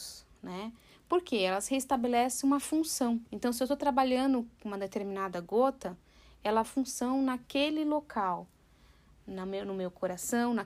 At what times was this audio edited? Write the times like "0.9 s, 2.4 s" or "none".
3.3 s, 6.6 s